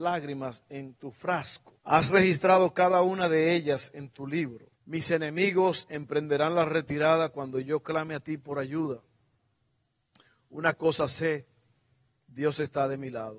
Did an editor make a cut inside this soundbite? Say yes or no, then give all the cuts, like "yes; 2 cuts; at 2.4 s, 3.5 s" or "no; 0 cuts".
yes; 2 cuts; at 1.8 s, 4.8 s